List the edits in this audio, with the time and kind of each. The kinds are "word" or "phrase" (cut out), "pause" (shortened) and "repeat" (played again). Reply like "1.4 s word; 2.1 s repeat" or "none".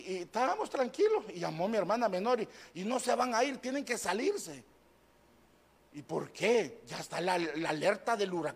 none